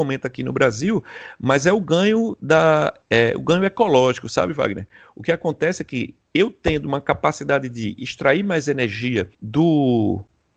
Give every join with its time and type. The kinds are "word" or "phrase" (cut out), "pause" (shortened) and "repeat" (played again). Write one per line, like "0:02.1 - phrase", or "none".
0:03.0 - pause
0:09.3 - pause